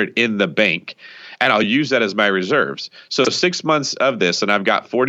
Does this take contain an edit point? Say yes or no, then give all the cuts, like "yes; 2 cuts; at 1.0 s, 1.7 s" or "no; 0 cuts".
no; 0 cuts